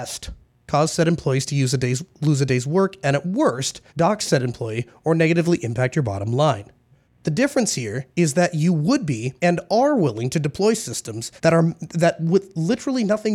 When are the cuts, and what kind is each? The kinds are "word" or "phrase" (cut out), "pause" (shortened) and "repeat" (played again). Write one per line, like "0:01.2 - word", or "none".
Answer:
0:03.9 - pause
0:07.1 - pause
0:08.1 - pause
0:09.4 - pause
0:11.4 - pause